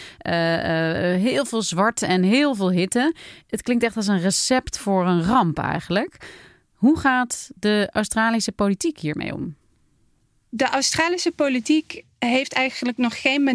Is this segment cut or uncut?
uncut